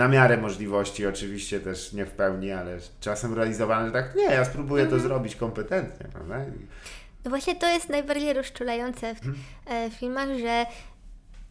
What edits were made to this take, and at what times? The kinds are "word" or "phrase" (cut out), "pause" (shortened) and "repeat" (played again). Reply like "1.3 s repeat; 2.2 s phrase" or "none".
9.2 s word